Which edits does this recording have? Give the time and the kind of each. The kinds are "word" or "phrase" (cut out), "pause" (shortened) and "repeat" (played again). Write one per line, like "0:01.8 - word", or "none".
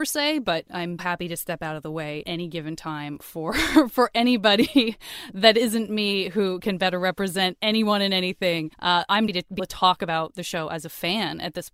0:01.0 - word
0:02.2 - word
0:08.7 - pause
0:09.3 - phrase
0:09.6 - word